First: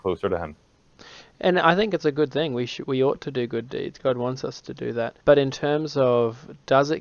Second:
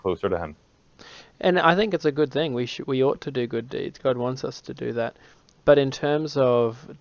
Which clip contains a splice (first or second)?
first